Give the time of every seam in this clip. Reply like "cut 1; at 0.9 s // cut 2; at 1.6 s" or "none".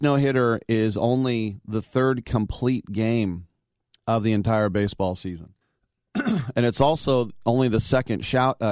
cut 1; at 3.8 s // cut 2; at 5.6 s